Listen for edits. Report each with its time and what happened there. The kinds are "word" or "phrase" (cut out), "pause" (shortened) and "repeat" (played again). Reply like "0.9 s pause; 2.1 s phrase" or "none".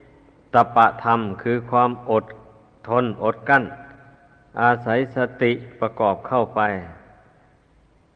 none

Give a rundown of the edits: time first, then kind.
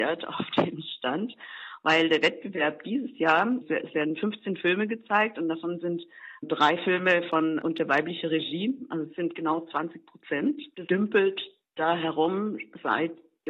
3.6 s word; 7.6 s word; 10.9 s word

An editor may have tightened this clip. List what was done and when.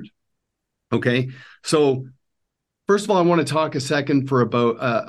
none

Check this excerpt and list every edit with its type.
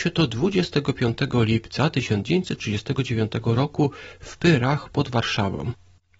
none

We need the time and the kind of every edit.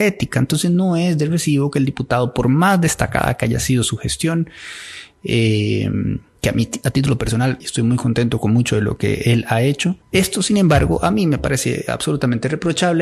7.6 s phrase; 10.0 s pause

